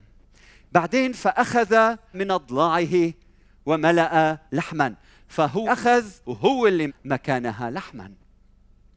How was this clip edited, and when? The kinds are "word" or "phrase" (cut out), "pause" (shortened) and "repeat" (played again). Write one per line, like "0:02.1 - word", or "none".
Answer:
0:02.1 - word
0:04.5 - word
0:05.6 - word
0:06.2 - word
0:06.9 - word